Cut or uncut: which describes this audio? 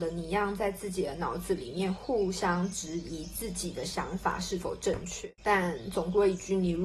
cut